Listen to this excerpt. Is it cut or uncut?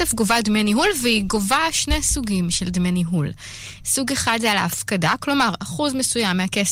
uncut